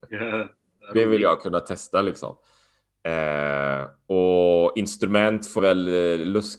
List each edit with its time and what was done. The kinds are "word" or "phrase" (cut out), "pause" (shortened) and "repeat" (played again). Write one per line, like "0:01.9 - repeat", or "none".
0:05.6 - word